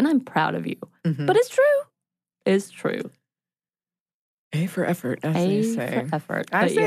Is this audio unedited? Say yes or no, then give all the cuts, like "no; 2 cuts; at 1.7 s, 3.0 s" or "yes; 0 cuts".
yes; 0 cuts